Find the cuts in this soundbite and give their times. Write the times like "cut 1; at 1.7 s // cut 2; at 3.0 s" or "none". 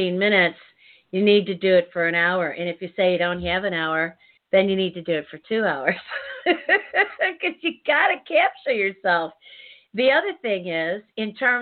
cut 1; at 4.4 s

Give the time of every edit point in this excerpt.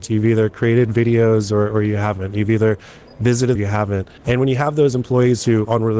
cut 1; at 3.6 s // cut 2; at 4.2 s

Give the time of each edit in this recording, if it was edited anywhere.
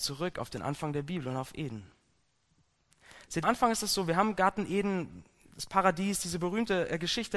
cut 1; at 3.4 s

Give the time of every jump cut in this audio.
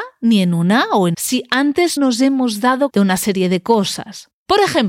cut 1; at 1.1 s // cut 2; at 2.0 s // cut 3; at 2.9 s

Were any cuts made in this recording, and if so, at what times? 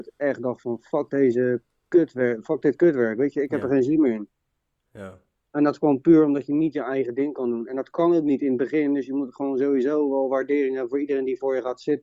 none

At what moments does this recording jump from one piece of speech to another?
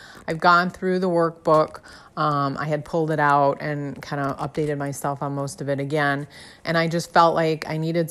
none

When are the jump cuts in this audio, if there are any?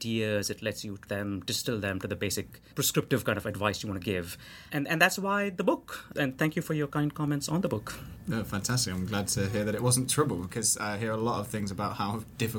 cut 1; at 1.1 s

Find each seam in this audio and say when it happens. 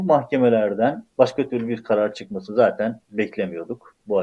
cut 1; at 1.1 s

